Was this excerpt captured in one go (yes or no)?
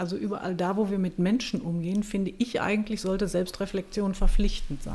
yes